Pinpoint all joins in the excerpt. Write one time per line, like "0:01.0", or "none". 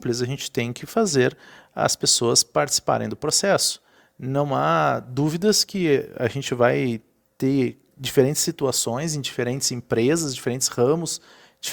none